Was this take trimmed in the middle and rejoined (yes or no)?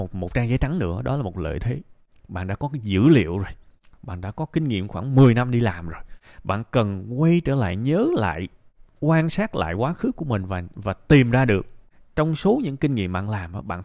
no